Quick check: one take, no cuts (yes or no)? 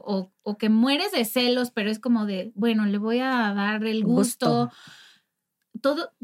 yes